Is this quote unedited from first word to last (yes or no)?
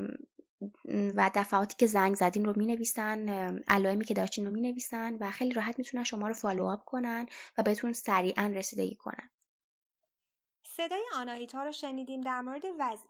yes